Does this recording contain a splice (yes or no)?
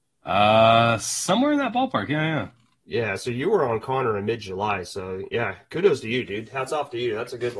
no